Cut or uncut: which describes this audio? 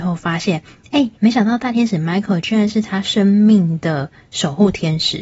cut